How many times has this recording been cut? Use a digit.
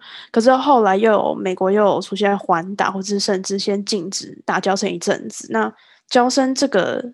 0